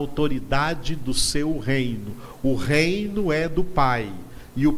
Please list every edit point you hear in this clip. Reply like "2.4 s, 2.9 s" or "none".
none